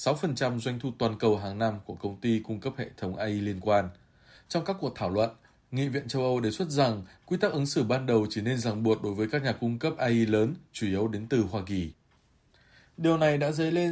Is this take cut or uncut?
uncut